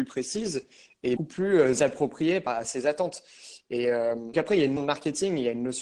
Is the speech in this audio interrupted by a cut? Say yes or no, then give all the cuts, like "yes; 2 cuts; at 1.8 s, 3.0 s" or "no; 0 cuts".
yes; 4 cuts; at 1.2 s, 2.5 s, 4.3 s, 4.8 s